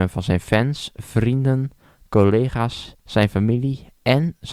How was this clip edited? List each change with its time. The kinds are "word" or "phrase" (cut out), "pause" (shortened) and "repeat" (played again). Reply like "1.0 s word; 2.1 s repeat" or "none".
3.0 s pause